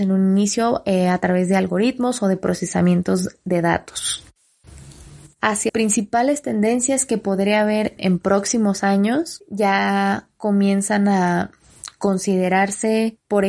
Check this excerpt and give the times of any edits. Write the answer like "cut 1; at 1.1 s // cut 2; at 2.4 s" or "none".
cut 1; at 5.7 s // cut 2; at 8.0 s